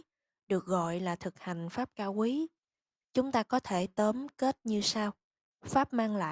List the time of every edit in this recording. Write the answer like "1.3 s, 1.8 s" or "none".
none